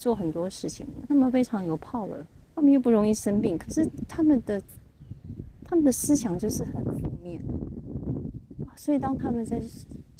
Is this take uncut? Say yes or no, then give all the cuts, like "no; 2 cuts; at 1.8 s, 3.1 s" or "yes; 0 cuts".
no; 1 cut; at 2.3 s